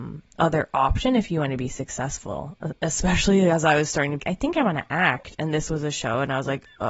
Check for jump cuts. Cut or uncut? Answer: cut